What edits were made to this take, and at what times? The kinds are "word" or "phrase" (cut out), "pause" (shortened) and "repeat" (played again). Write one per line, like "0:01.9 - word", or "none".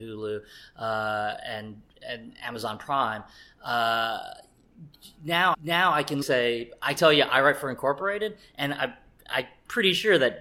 0:05.5 - repeat
0:06.2 - word
0:07.0 - phrase